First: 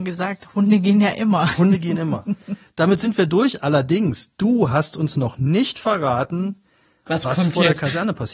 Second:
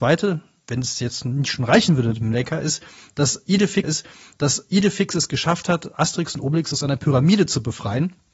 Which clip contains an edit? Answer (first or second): second